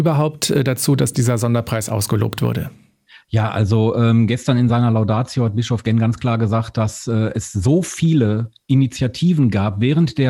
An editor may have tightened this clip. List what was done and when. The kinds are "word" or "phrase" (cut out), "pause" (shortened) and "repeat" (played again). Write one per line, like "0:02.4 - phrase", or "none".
none